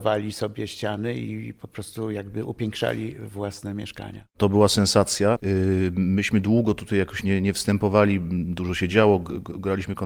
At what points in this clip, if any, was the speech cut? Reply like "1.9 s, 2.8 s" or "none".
none